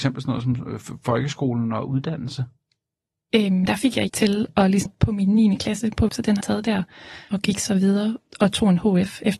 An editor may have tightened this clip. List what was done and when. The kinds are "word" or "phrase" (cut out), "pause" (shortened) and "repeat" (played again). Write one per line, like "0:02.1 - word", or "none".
0:03.7 - word
0:04.1 - word
0:04.9 - word
0:06.1 - word
0:06.4 - word
0:07.3 - word